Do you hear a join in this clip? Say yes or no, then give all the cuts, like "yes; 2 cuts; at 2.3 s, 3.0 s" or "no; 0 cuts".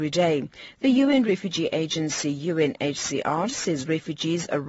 no; 0 cuts